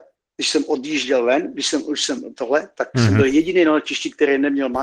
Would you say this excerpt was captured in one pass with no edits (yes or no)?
yes